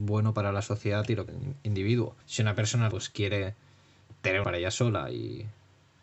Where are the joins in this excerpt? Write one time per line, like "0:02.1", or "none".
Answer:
0:01.3
0:02.2
0:02.9
0:04.4